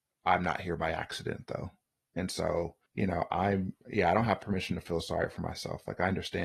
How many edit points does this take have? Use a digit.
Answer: 1